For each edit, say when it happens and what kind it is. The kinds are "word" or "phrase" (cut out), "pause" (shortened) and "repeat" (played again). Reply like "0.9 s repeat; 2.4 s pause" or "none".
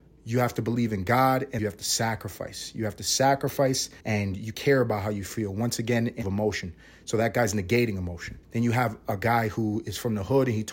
1.6 s phrase; 4.0 s pause; 4.5 s word; 6.2 s phrase; 8.4 s pause